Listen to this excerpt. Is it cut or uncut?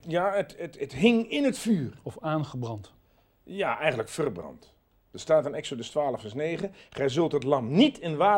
uncut